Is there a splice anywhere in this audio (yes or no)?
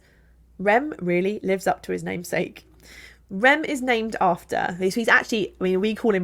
no